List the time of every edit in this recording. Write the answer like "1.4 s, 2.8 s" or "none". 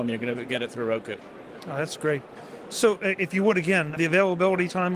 4.0 s